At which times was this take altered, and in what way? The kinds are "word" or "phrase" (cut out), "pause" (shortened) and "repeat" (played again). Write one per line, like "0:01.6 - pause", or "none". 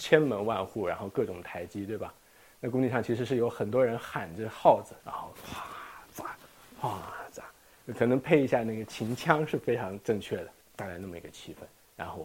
0:05.0 - pause
0:05.3 - pause